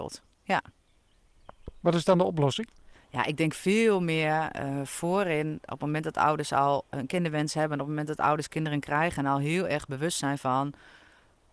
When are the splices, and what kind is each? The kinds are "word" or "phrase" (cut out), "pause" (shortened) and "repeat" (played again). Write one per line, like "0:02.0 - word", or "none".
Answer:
none